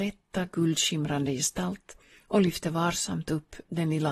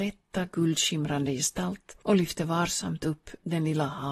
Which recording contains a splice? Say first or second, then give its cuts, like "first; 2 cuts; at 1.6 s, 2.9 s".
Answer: second; 1 cut; at 2.0 s